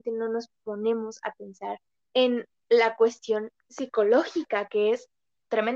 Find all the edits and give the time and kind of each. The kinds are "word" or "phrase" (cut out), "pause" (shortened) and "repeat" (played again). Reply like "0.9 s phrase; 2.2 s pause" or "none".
2.0 s pause